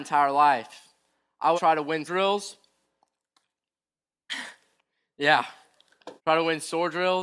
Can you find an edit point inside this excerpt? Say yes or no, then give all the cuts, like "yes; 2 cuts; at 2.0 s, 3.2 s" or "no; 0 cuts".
yes; 3 cuts; at 1.6 s, 2.1 s, 6.2 s